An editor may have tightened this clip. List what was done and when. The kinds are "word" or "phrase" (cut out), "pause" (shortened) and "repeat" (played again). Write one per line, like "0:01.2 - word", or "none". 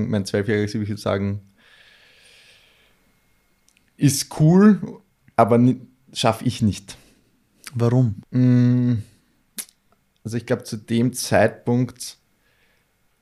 0:08.2 - pause